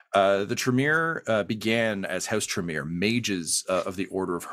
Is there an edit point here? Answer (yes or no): no